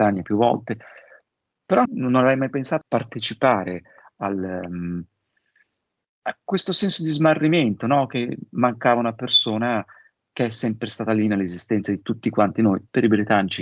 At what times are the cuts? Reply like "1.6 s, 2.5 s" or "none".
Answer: 1.9 s, 2.8 s, 6.5 s, 8.5 s